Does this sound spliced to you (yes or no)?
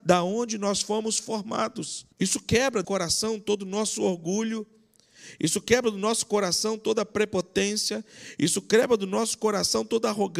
yes